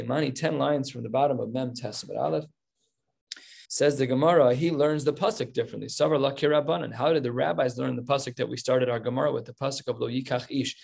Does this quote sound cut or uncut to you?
cut